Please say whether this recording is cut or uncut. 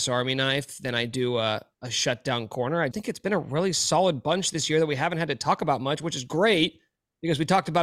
cut